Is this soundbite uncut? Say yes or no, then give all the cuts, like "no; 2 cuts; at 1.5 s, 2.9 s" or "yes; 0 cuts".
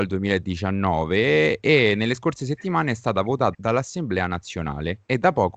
no; 1 cut; at 3.5 s